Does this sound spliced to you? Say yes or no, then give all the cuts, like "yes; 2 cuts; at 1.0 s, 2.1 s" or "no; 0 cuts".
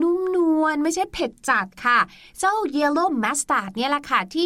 no; 0 cuts